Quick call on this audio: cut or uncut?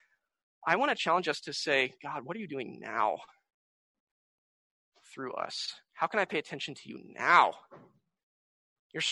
uncut